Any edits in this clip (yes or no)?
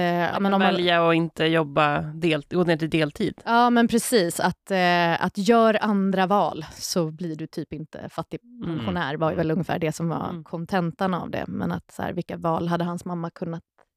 no